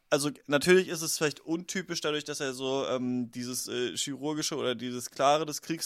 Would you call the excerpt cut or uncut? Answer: uncut